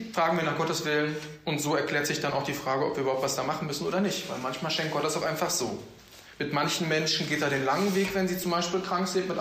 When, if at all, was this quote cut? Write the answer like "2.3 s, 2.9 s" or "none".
none